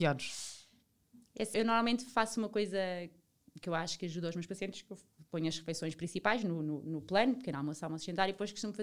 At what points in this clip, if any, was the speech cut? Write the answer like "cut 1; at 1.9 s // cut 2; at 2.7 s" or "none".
cut 1; at 1.5 s

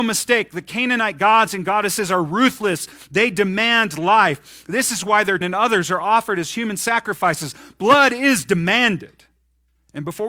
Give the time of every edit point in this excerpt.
cut 1; at 5.4 s

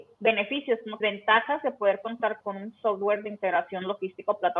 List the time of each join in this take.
cut 1; at 1.0 s // cut 2; at 2.4 s

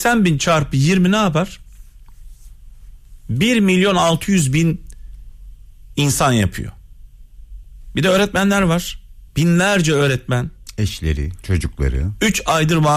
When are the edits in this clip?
cut 1; at 9.3 s

